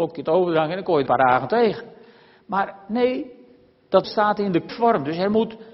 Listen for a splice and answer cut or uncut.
cut